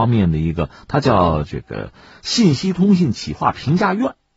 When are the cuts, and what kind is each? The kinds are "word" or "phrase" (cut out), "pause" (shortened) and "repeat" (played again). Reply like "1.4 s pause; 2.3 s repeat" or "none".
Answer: none